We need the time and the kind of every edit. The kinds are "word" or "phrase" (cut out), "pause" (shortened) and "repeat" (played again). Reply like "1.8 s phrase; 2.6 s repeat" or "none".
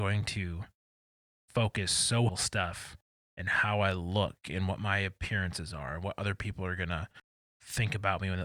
2.3 s phrase

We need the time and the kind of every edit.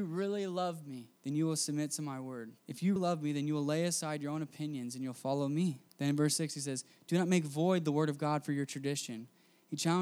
1.2 s pause; 2.6 s pause; 3.0 s word; 5.9 s pause

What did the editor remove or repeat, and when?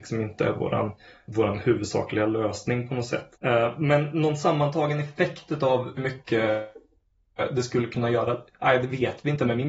1.3 s word; 3.4 s pause; 6.0 s word

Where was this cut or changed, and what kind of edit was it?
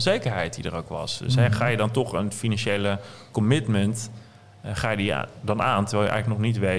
none

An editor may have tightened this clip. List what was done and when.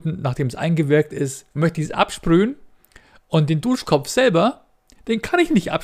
1.5 s pause

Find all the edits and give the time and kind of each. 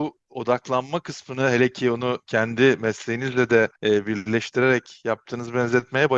3.8 s pause

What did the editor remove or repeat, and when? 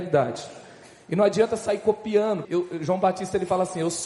2.4 s word

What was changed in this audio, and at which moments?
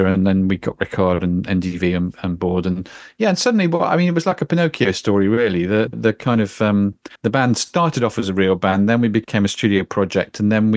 7.2 s pause

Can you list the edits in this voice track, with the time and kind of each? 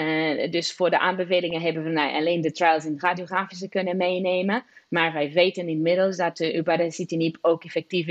none

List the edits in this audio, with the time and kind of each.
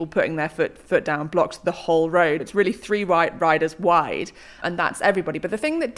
2.4 s word; 4.6 s word

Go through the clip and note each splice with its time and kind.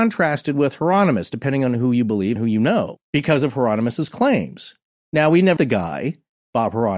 2.4 s word; 5.6 s word

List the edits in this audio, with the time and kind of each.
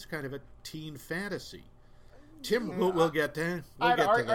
2.7 s word

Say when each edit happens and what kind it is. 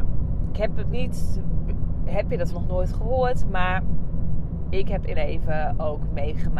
0.9 s phrase; 2.5 s word; 5.1 s word

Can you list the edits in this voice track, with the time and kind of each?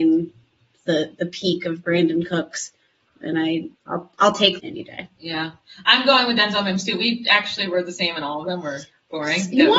3.1 s phrase; 3.7 s pause; 4.6 s phrase

